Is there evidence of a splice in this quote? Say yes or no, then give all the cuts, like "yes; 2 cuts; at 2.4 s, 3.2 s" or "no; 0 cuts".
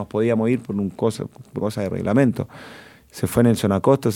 yes; 1 cut; at 1.6 s